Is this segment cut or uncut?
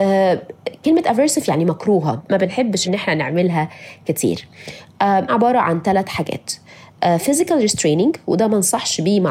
cut